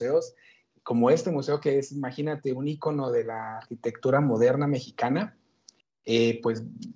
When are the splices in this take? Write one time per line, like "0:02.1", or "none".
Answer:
none